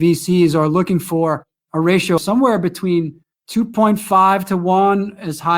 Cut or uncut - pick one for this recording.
cut